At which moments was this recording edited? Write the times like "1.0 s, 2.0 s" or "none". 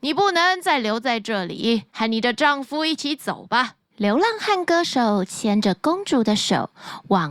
1.9 s, 3.9 s